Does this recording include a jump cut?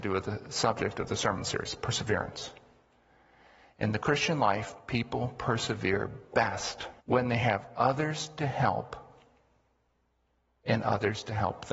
yes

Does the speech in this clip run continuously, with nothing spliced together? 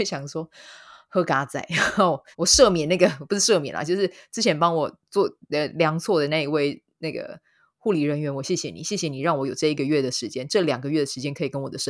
no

